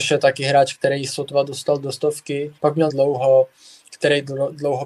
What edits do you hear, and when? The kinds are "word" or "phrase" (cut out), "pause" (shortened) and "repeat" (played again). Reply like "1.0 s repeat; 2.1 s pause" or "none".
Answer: 1.1 s word; 2.6 s pause; 2.9 s phrase